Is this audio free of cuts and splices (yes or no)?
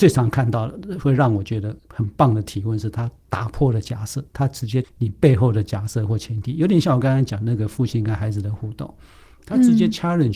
no